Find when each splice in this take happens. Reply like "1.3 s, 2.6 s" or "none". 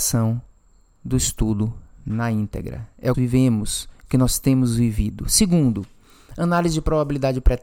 3.1 s